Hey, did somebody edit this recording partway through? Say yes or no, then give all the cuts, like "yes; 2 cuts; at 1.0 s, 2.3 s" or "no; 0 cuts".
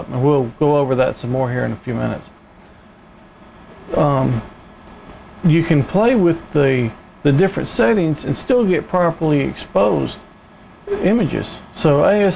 no; 0 cuts